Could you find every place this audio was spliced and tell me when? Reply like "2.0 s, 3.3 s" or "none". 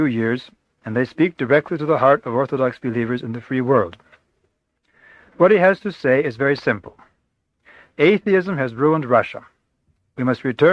none